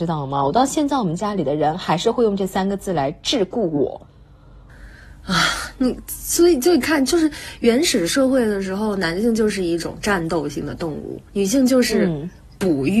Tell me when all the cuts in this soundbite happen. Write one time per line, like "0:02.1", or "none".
0:11.3